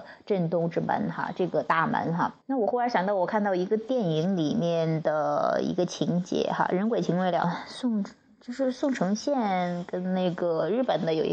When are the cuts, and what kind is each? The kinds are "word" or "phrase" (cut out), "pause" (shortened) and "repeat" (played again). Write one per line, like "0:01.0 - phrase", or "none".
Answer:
0:02.4 - pause
0:07.4 - phrase